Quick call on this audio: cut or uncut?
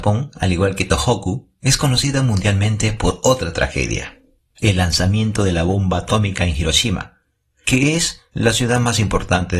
uncut